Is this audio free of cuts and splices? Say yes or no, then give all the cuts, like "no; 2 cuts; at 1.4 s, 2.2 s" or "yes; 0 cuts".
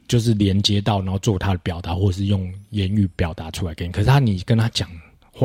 yes; 0 cuts